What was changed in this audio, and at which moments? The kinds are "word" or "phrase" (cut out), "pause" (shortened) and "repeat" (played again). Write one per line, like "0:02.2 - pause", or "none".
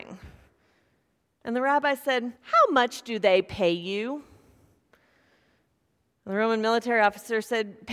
0:02.4 - pause